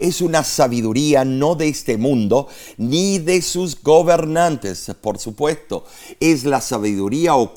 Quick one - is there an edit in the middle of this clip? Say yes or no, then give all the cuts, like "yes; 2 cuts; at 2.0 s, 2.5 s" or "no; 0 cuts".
no; 0 cuts